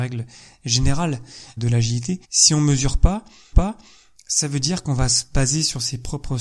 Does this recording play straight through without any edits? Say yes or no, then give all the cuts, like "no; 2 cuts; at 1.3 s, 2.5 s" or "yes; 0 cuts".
no; 3 cuts; at 1.6 s, 2.2 s, 3.5 s